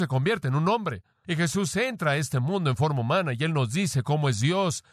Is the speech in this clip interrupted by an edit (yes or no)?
no